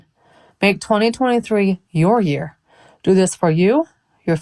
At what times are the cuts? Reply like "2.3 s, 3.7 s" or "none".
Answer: none